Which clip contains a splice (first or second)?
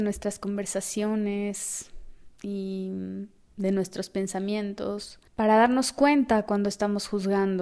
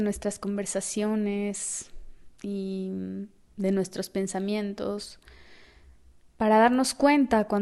first